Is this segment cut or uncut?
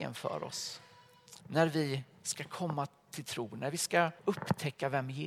cut